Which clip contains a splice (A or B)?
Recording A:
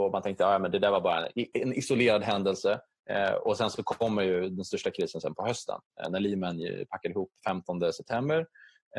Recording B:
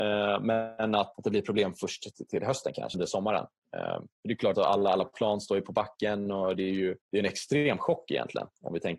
B